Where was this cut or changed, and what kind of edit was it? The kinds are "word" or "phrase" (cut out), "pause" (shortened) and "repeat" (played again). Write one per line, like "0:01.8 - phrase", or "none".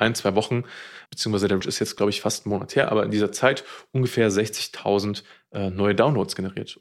0:01.1 - word
0:01.6 - word